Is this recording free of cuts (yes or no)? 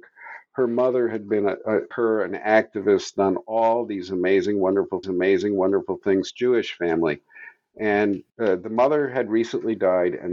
no